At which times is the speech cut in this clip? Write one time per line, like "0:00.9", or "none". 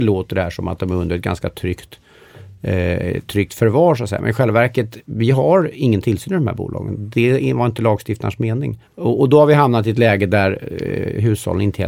0:08.8